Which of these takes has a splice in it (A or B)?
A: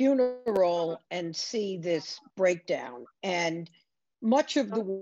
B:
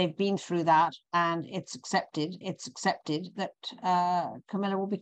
B